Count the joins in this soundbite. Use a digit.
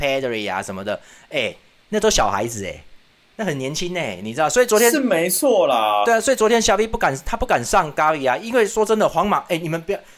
0